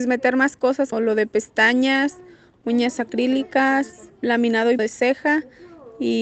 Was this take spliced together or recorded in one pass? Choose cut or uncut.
cut